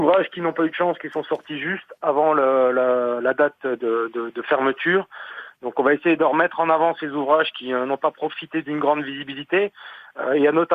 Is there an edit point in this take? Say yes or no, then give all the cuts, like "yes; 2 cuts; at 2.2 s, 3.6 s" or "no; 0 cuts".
yes; 1 cut; at 3.8 s